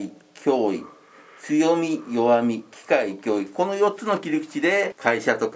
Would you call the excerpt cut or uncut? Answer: uncut